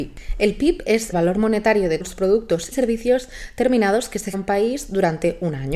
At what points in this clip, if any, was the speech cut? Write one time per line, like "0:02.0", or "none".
0:01.1
0:02.0
0:02.7
0:04.3